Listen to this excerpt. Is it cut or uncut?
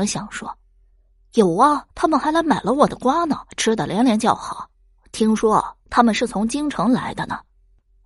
cut